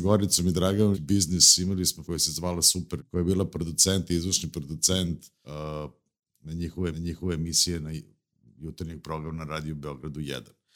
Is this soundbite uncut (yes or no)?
no